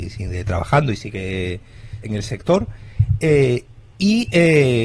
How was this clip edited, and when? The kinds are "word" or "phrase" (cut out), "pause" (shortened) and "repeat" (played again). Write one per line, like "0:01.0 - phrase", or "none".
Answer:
0:02.0 - phrase